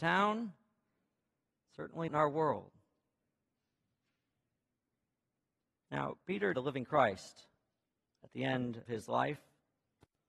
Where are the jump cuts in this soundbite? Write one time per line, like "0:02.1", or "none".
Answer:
0:02.1
0:06.5
0:08.9